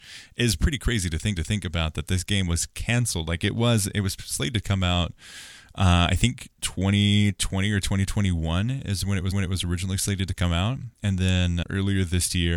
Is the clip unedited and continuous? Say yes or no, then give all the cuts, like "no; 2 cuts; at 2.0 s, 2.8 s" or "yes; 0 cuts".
no; 4 cuts; at 1.4 s, 9.3 s, 10.9 s, 11.6 s